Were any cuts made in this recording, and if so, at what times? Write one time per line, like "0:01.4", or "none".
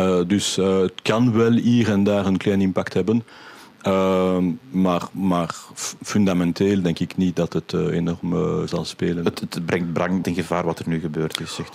0:04.6
0:08.7
0:10.2